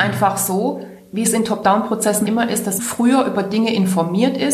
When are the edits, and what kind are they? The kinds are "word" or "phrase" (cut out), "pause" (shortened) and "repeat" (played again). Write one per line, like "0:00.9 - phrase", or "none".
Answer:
0:02.3 - word
0:02.8 - word